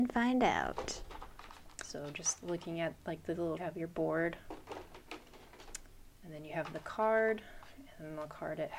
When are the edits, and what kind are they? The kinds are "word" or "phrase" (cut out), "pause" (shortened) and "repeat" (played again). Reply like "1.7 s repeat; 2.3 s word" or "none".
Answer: 3.6 s phrase